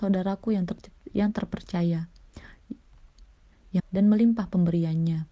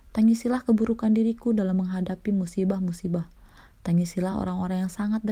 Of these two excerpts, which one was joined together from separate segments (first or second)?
first